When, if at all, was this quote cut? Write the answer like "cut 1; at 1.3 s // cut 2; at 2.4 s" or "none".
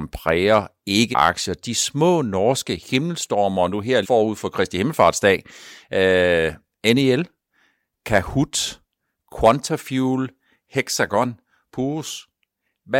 cut 1; at 1.1 s // cut 2; at 4.0 s